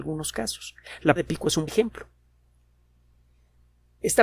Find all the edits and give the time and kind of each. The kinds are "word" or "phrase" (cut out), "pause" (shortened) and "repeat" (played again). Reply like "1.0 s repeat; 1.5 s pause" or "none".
1.2 s word; 1.7 s word